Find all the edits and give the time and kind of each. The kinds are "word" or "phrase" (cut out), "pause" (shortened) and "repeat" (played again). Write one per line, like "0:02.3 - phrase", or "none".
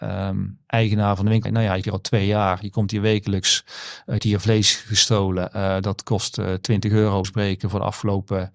0:01.4 - word
0:01.8 - word
0:04.2 - word
0:07.2 - word

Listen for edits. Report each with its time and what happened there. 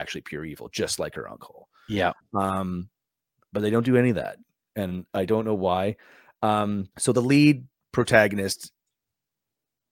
0:05.1 - word
0:06.9 - pause

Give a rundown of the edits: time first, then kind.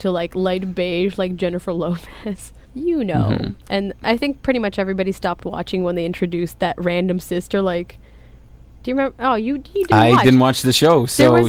0:02.6 - pause
0:03.6 - pause

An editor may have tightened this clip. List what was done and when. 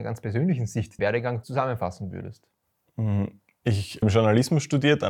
0:01.0 - word
0:01.4 - word
0:04.0 - word

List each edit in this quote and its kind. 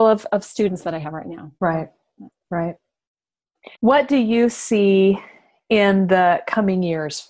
0:01.6 - pause
0:03.7 - pause

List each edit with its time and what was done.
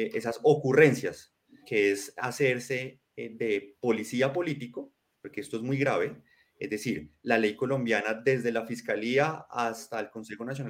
0:01.6 - word

